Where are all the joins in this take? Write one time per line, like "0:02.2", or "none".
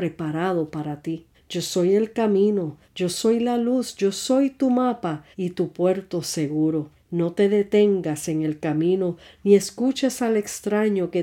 0:01.3
0:02.8
0:05.3
0:06.9